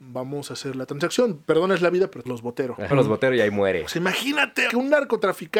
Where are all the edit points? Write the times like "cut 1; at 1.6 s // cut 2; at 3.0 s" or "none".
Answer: cut 1; at 2.3 s // cut 2; at 2.9 s // cut 3; at 4.7 s